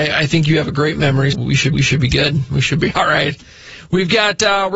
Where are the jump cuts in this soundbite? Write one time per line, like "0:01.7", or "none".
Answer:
0:01.3
0:01.7